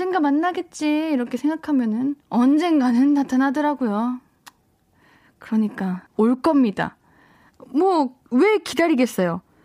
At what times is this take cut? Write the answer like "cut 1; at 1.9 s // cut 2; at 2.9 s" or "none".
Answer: cut 1; at 2.2 s // cut 2; at 6.1 s // cut 3; at 8.3 s